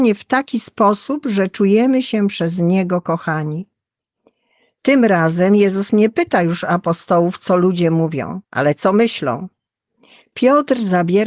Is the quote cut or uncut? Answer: cut